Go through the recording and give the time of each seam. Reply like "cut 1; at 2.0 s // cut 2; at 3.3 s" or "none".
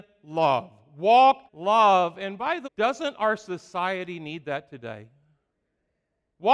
cut 1; at 1.5 s // cut 2; at 2.6 s